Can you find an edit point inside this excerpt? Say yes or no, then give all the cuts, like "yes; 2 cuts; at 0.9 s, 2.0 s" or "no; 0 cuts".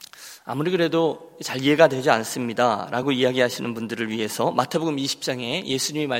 no; 0 cuts